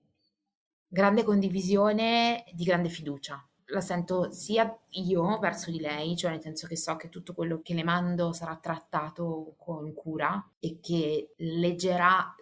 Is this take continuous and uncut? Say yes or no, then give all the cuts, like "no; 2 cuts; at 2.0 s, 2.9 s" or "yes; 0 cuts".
yes; 0 cuts